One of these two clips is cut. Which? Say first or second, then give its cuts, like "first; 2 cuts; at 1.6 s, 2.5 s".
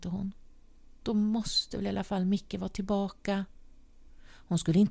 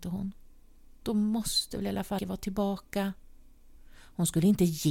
second; 1 cut; at 2.2 s